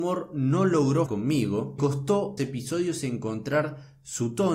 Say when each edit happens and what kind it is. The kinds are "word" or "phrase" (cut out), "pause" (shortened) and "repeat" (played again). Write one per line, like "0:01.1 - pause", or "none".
0:01.1 - word
0:01.8 - word
0:02.4 - word